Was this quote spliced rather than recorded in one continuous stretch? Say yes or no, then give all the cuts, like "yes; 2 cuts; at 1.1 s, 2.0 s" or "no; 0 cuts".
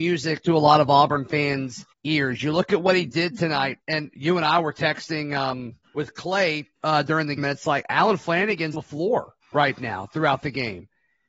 yes; 7 cuts; at 1.9 s, 3.8 s, 5.8 s, 6.8 s, 7.4 s, 8.7 s, 9.4 s